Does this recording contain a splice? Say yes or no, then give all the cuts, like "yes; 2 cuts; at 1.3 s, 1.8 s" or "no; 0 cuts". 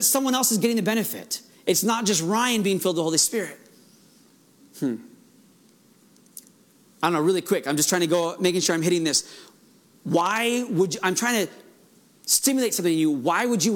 no; 0 cuts